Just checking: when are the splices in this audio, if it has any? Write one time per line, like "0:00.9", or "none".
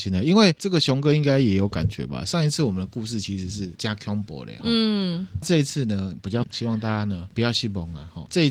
0:06.4